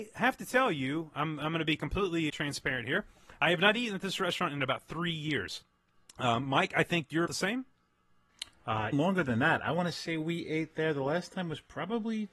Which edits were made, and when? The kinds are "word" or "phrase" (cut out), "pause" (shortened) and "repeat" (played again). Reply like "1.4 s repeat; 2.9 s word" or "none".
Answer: 2.3 s word; 7.3 s word; 8.9 s word